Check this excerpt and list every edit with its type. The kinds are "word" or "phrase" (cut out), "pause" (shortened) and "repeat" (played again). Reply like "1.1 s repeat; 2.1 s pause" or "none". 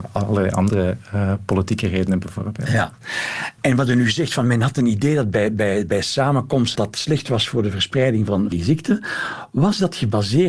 3.6 s pause; 6.8 s word; 8.5 s word